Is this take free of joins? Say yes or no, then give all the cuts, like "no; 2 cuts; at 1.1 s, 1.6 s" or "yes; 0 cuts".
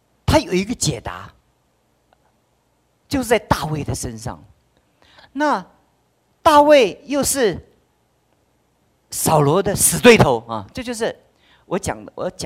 yes; 0 cuts